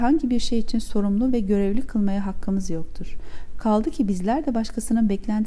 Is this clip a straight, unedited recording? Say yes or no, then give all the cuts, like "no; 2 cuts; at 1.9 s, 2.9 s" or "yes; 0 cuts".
yes; 0 cuts